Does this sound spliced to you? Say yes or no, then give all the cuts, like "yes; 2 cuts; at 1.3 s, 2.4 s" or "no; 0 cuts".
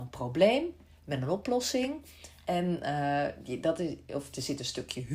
no; 0 cuts